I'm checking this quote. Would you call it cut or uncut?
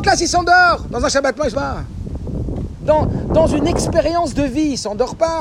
cut